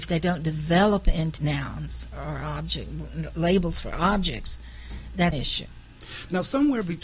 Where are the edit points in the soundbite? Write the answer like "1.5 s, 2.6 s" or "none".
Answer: 1.4 s, 2.1 s, 3.3 s, 5.3 s